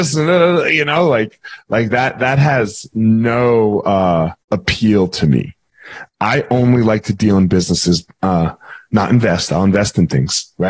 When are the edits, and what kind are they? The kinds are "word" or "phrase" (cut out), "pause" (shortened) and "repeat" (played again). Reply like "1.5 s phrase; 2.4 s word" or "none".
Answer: 4.4 s pause